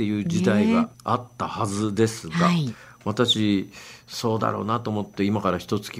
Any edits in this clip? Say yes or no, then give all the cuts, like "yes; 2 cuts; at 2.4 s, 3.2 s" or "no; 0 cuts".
yes; 1 cut; at 0.9 s